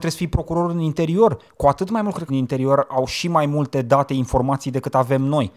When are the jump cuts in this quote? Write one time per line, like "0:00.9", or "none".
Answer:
0:02.3